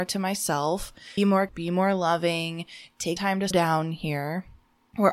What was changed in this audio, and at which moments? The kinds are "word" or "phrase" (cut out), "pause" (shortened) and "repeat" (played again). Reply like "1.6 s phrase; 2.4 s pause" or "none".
1.2 s word; 1.5 s word; 3.2 s word; 3.5 s word